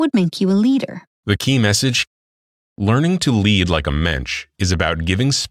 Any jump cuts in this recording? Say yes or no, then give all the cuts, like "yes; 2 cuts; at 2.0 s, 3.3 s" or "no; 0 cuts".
yes; 1 cut; at 1.1 s